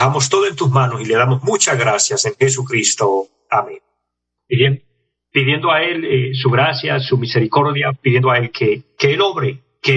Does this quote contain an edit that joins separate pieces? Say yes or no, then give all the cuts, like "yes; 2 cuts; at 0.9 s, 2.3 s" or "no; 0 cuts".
no; 0 cuts